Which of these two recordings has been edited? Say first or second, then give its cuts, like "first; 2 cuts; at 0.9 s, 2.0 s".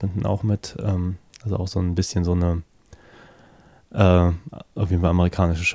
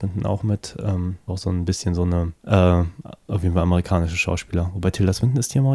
second; 2 cuts; at 1.3 s, 2.4 s